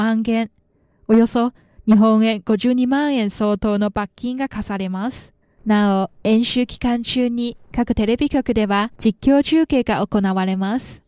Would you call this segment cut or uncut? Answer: cut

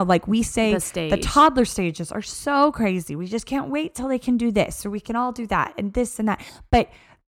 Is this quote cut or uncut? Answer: uncut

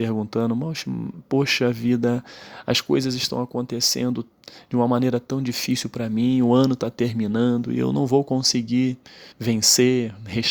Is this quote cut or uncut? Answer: cut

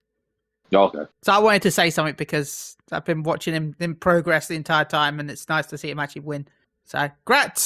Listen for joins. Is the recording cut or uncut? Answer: cut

